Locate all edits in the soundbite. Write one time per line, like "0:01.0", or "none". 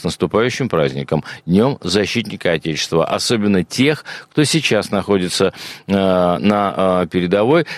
none